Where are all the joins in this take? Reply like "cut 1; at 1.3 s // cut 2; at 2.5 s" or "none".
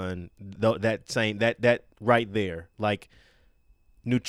cut 1; at 1.9 s